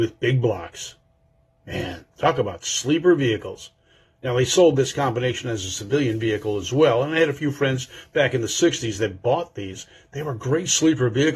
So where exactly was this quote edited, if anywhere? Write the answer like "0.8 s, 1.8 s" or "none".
none

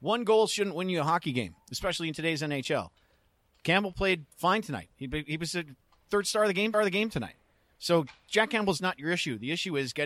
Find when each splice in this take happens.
1.6 s, 4.3 s, 6.7 s

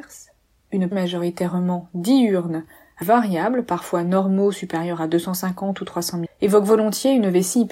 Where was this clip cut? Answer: 0.9 s, 3.0 s, 6.3 s

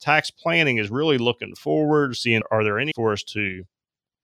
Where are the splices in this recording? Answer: 2.4 s, 2.9 s

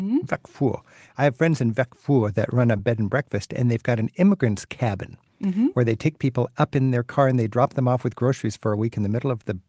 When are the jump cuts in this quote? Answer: none

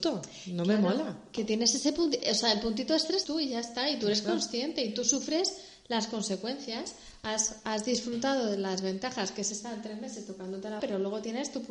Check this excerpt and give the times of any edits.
3.2 s, 10.8 s

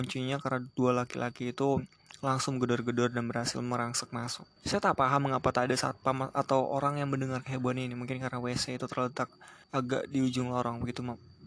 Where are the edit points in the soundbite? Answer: 4.6 s, 9.6 s

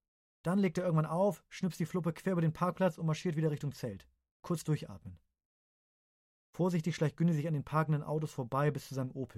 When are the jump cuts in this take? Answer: none

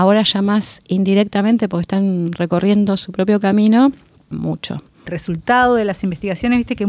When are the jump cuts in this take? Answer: 4.3 s, 5.1 s

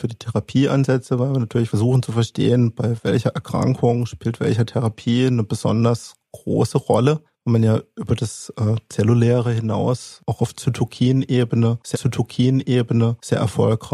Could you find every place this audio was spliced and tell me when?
7.3 s, 11.9 s

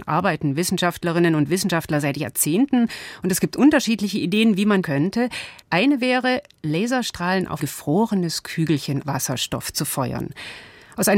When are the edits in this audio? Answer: 4.8 s, 5.6 s, 7.6 s, 9.0 s

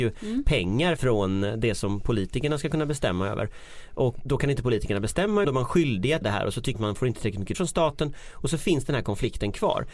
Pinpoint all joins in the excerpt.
1.0 s, 4.3 s, 5.4 s, 6.2 s, 6.7 s, 7.5 s

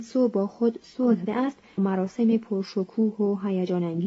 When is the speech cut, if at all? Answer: 1.3 s, 1.8 s

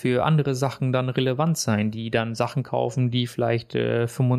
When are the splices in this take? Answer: none

